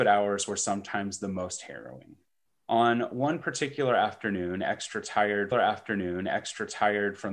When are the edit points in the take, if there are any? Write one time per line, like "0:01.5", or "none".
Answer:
0:02.5
0:05.5

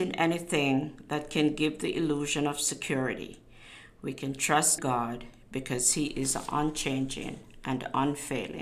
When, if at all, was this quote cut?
0:04.8

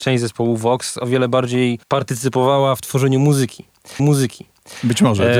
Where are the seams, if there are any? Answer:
0:01.8
0:04.0

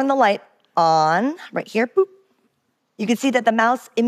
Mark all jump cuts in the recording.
none

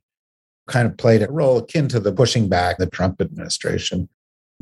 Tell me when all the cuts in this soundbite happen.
0:01.2
0:02.1
0:02.8

